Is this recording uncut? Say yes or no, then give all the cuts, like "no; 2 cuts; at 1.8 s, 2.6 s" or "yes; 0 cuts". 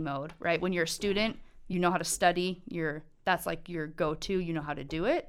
yes; 0 cuts